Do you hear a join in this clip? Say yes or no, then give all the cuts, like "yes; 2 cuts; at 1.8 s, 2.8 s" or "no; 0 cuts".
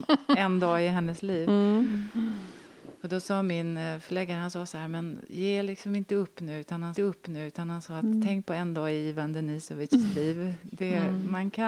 yes; 1 cut; at 6.9 s